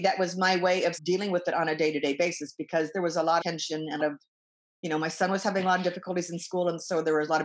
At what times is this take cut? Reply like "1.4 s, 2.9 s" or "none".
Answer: 1.0 s, 3.4 s, 4.0 s